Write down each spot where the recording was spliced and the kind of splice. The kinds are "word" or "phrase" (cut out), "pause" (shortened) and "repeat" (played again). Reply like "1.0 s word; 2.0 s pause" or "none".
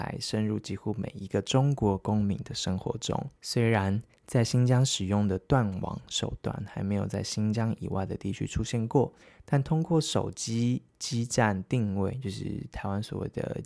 3.4 s pause